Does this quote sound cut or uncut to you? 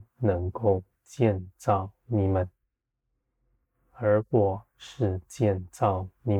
uncut